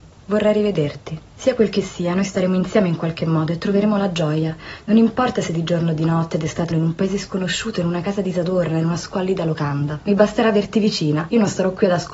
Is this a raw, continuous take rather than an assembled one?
no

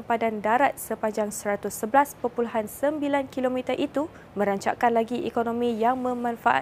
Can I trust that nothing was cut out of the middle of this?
no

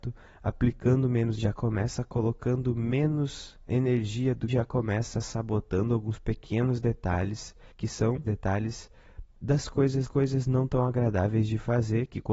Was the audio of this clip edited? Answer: yes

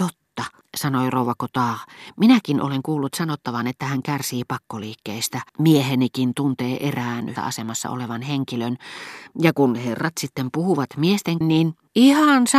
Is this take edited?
yes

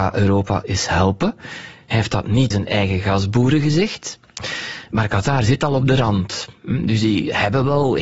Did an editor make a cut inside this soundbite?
yes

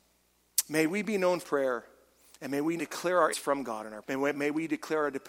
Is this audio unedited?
no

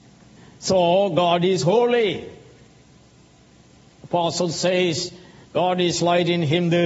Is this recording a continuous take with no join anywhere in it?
yes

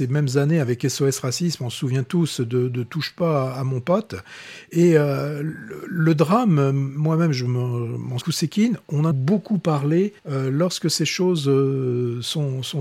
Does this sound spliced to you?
yes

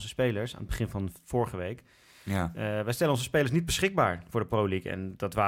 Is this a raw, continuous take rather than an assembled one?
yes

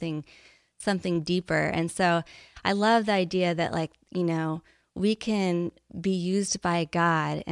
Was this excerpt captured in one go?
yes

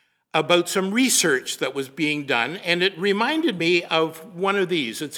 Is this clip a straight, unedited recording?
yes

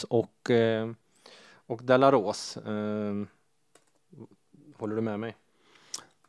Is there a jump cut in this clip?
no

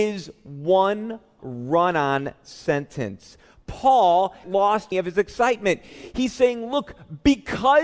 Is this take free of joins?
no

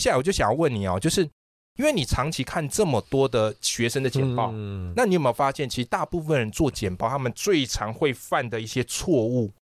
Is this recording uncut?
yes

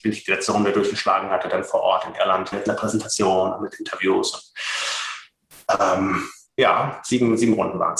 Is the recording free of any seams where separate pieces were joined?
no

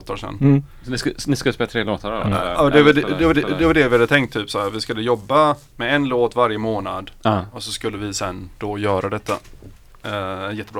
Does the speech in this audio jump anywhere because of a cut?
yes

